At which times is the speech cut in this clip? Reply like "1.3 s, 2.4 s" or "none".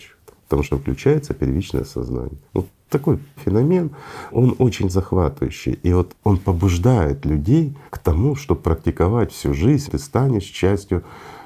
2.5 s, 3.4 s, 4.3 s, 6.2 s, 7.9 s, 9.9 s